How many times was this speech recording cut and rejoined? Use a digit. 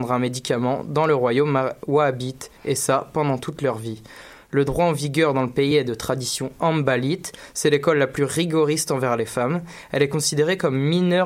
0